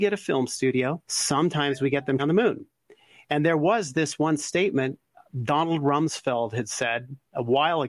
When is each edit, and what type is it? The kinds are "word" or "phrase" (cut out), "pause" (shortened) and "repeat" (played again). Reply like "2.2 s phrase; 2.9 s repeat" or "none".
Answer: 1.0 s pause; 2.2 s word

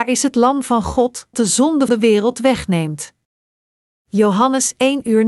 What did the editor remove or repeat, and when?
1.3 s word; 1.9 s word

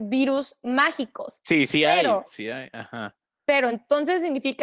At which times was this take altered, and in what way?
none

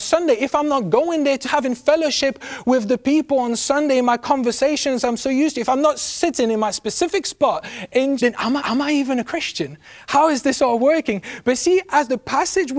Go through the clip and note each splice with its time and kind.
1.4 s phrase; 8.2 s word; 8.6 s repeat

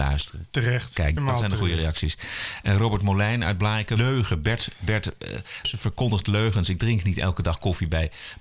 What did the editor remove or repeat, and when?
1.2 s phrase; 4.0 s phrase; 5.6 s word

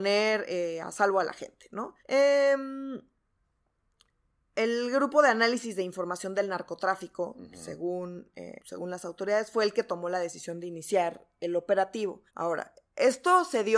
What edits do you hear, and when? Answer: 2.0 s pause; 8.6 s pause; 12.3 s pause

